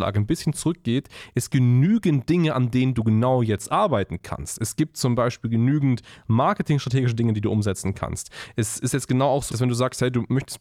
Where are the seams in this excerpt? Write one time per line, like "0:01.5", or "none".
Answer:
0:01.5
0:09.5